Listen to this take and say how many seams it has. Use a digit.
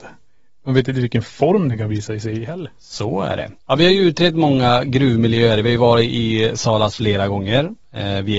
2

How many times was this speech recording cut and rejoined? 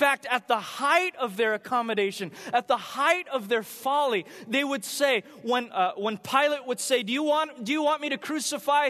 0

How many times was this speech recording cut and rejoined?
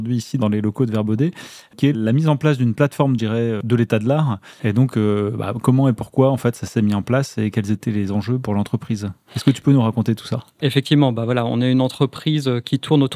1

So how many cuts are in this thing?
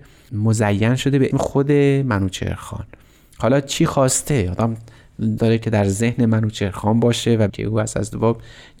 3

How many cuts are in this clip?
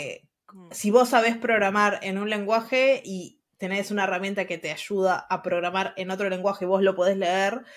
0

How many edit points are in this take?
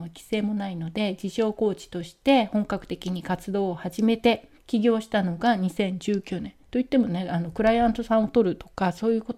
1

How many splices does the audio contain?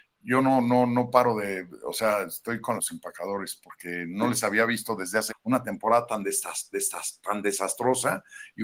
3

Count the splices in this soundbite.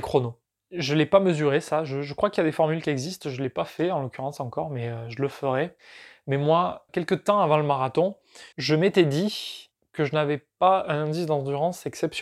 1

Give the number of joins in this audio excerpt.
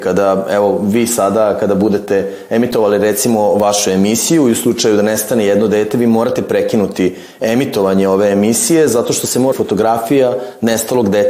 1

